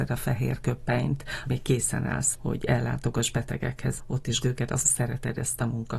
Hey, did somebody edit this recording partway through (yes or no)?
yes